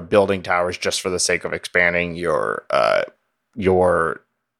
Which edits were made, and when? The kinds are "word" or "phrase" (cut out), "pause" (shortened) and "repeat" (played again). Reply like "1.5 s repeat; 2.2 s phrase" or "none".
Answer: none